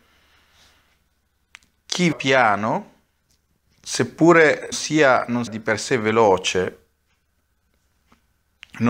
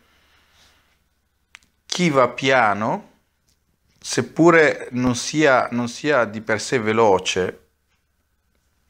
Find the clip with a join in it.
first; 3 cuts; at 2.1 s, 4.7 s, 5.5 s

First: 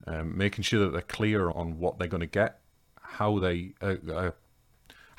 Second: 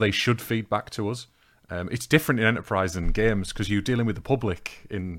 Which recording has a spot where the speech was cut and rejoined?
first; 1 cut; at 1.5 s

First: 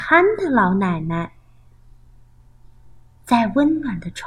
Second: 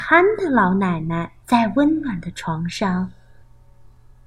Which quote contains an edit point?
second; 1 cut; at 1.4 s

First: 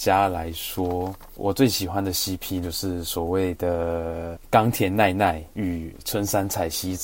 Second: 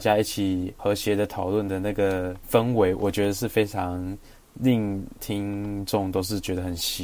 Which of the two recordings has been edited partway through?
first; 1 cut; at 2.6 s

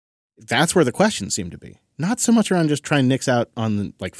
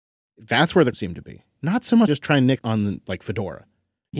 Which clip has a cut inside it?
second; 3 cuts; at 0.9 s, 2.1 s, 2.6 s

